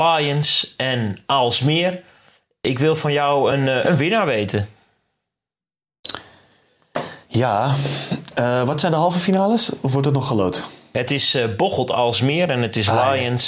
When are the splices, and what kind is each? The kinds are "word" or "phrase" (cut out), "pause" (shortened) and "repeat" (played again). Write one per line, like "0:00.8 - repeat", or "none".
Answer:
none